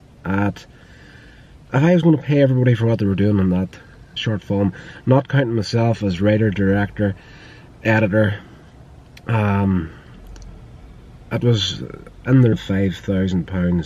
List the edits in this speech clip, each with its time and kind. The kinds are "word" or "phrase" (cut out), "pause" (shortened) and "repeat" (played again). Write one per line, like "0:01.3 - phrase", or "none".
0:04.2 - word
0:12.5 - word